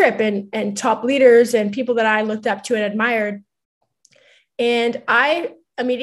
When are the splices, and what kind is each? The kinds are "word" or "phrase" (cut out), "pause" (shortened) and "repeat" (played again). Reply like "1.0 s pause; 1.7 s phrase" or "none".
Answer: none

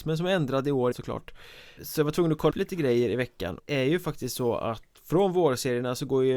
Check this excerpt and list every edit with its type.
0.9 s word; 1.8 s word; 2.5 s word; 3.6 s phrase

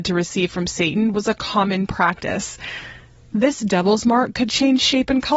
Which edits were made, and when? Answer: none

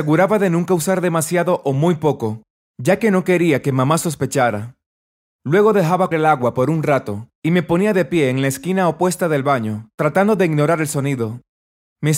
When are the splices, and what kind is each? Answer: 6.1 s word

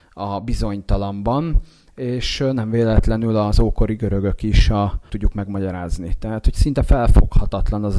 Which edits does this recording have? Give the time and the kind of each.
5.1 s phrase

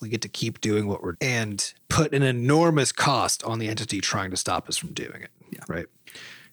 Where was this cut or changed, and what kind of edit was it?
1.1 s word

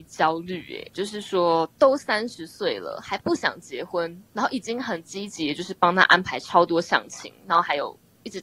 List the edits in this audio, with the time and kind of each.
4.3 s pause

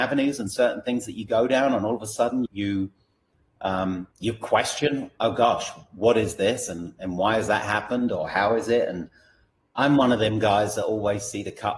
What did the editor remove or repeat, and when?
2.5 s word; 4.1 s pause

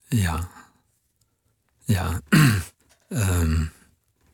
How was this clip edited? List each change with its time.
2.8 s pause

